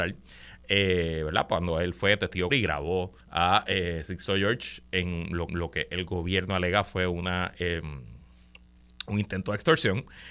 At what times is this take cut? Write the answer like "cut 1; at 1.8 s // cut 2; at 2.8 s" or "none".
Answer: cut 1; at 2.5 s // cut 2; at 3.2 s // cut 3; at 5.5 s